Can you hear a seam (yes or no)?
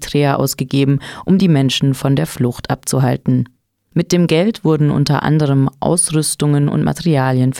no